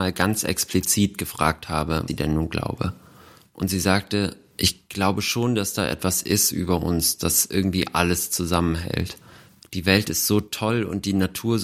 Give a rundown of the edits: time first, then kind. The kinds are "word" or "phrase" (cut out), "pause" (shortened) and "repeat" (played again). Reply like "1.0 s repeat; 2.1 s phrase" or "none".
2.1 s word

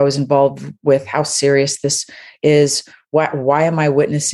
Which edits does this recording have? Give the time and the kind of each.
none

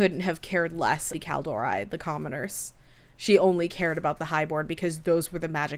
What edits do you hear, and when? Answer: 1.1 s word

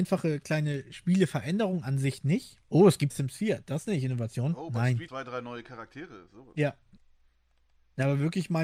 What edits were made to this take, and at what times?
2.6 s pause; 3.1 s phrase; 5.1 s phrase

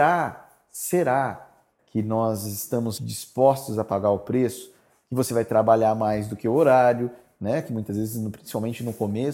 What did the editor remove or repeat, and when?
1.8 s word; 3.0 s word

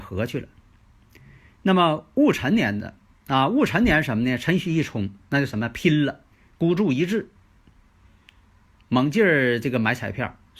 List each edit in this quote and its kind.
5.2 s pause; 6.3 s pause

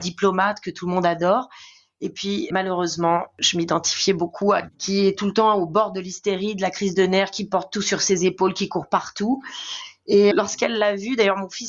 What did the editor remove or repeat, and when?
2.5 s word; 4.7 s word; 10.3 s word

